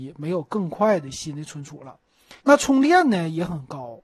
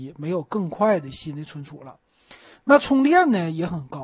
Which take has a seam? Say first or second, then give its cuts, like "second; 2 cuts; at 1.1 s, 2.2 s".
first; 1 cut; at 2.4 s